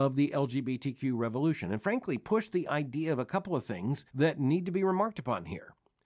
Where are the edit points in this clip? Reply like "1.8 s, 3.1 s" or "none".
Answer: 4.1 s

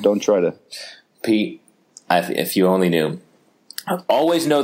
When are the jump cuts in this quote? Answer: none

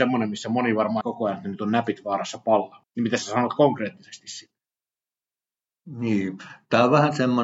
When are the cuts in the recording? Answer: 1.0 s, 2.8 s

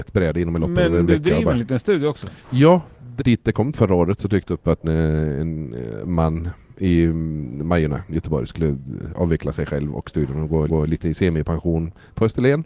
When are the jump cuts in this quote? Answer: 2.4 s, 3.2 s, 3.7 s, 4.8 s, 10.7 s

